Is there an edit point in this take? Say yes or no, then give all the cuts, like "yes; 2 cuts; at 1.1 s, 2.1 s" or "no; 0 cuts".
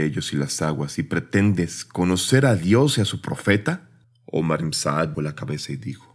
yes; 2 cuts; at 4.0 s, 5.1 s